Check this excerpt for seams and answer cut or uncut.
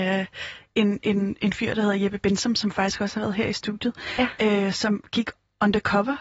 uncut